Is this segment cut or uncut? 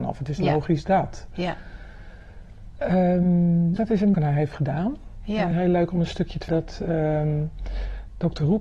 cut